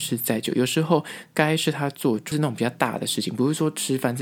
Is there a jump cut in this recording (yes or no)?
yes